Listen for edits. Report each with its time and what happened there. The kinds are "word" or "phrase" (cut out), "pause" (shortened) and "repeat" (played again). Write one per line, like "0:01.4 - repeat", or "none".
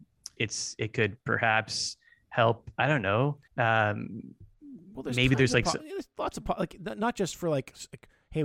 0:01.2 - pause
0:03.5 - pause